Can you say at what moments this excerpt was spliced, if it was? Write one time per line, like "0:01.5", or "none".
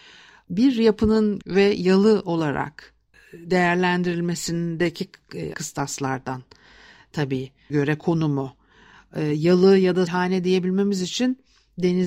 0:01.4
0:05.5
0:07.7
0:10.1